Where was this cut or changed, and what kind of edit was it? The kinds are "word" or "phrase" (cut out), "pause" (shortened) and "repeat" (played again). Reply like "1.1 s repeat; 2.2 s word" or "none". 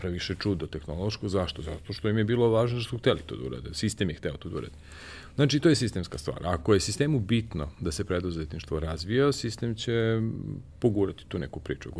none